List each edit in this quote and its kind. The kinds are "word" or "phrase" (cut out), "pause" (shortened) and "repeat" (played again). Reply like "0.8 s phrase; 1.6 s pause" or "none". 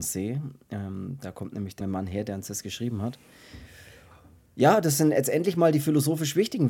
1.8 s word